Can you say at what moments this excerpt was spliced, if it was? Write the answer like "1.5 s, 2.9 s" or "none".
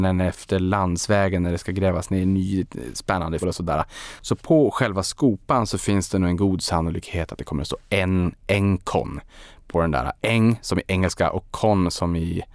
3.4 s

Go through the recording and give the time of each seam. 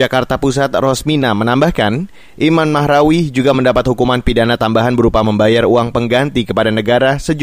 none

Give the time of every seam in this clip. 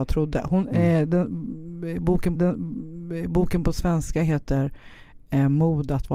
2.3 s

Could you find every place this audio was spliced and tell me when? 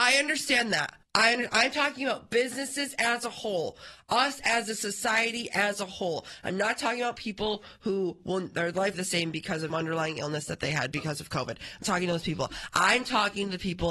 1.0 s, 8.9 s, 9.7 s, 11.8 s

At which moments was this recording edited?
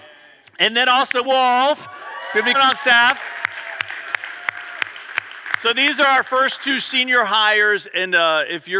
1.2 s, 2.5 s

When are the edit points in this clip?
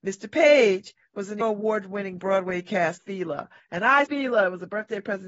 1.4 s, 3.0 s, 4.1 s

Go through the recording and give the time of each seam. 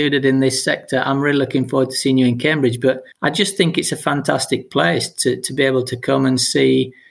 3.1 s

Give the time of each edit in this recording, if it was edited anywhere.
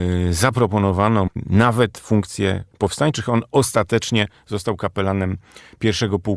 1.3 s, 2.7 s

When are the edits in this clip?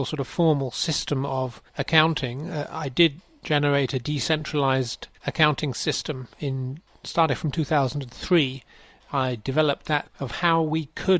1.7 s, 5.1 s, 10.0 s

